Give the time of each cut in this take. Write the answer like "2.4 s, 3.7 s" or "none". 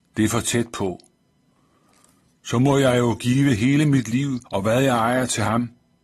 4.5 s